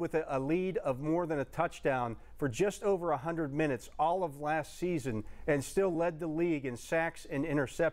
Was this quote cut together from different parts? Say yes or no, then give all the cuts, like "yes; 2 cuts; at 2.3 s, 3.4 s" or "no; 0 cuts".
no; 0 cuts